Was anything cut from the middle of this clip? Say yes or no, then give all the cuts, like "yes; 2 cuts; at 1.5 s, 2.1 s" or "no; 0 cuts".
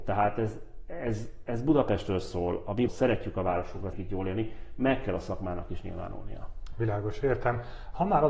yes; 2 cuts; at 2.9 s, 3.9 s